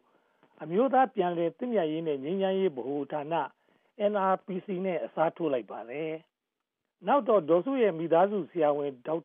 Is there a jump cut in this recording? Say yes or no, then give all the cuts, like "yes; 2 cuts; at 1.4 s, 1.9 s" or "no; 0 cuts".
no; 0 cuts